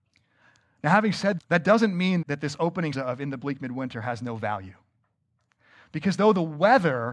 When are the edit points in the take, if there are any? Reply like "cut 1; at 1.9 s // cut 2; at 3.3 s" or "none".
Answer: cut 1; at 1.4 s // cut 2; at 2.2 s // cut 3; at 2.9 s